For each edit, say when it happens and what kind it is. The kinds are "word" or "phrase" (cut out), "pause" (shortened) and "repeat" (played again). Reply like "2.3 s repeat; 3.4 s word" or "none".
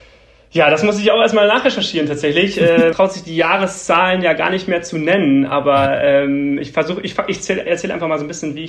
2.9 s word